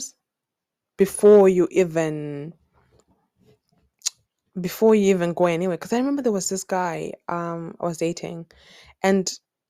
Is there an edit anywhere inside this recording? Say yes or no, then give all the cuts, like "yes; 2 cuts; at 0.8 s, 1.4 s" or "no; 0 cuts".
yes; 1 cut; at 4.2 s